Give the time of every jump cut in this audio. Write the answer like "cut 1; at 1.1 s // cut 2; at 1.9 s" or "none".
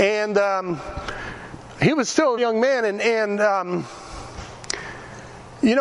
cut 1; at 2.4 s

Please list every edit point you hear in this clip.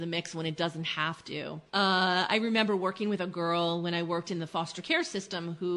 cut 1; at 1.7 s

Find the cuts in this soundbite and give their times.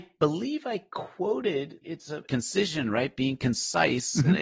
cut 1; at 1.8 s // cut 2; at 2.3 s

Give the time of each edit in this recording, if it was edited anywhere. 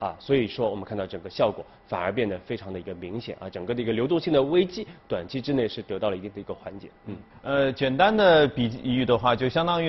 cut 1; at 7.3 s

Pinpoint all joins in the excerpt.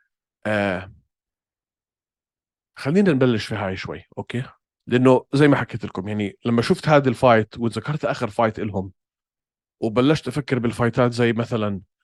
cut 1; at 4.6 s

